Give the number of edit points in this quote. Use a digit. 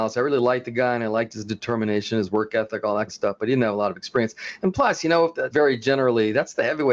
2